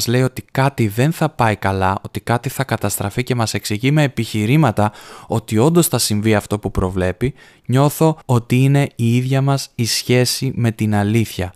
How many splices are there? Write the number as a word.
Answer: one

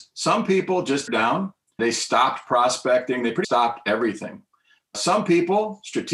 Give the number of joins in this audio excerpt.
three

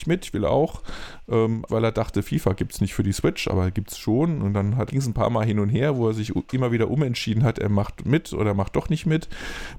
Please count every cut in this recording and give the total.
two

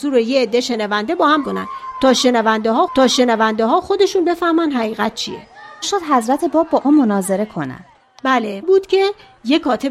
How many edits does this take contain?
five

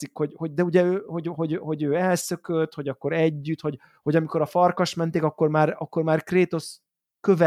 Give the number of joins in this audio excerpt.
zero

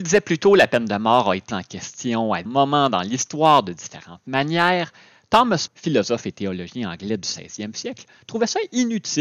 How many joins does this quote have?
three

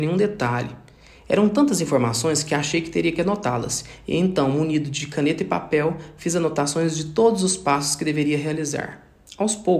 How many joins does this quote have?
zero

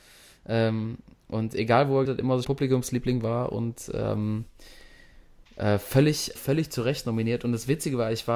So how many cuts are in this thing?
four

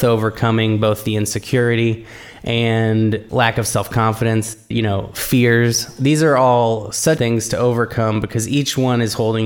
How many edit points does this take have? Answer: three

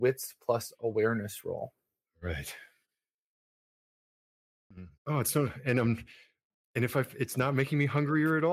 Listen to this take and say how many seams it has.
one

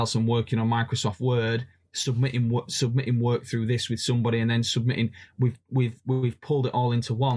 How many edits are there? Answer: zero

